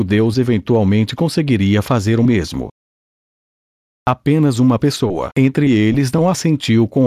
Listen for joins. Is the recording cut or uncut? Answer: uncut